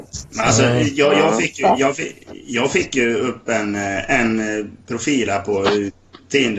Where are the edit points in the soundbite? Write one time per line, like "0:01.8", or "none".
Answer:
none